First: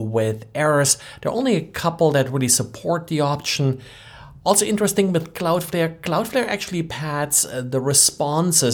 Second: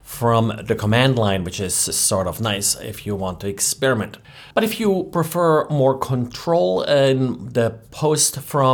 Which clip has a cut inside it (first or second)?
second